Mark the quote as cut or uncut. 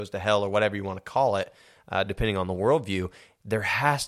uncut